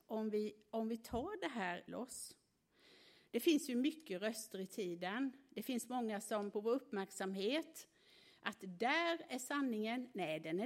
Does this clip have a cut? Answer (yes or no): yes